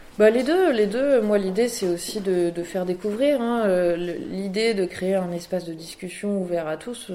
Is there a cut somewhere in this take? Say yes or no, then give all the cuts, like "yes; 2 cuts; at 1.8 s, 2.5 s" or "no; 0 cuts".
no; 0 cuts